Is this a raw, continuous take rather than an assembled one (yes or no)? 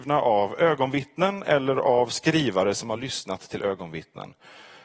yes